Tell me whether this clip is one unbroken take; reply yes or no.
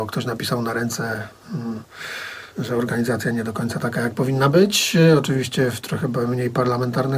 no